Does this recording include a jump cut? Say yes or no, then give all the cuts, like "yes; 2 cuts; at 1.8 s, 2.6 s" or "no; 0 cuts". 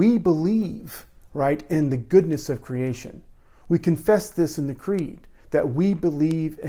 no; 0 cuts